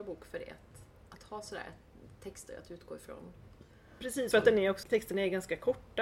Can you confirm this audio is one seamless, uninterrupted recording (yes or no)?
no